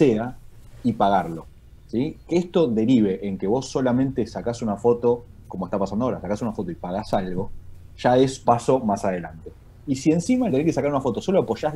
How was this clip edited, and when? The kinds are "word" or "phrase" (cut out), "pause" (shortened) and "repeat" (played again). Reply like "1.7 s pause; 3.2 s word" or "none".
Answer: 8.4 s word; 10.5 s phrase